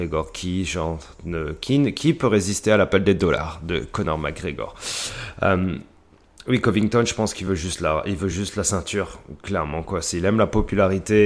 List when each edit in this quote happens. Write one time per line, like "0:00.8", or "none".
none